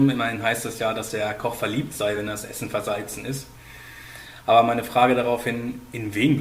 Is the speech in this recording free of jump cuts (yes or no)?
yes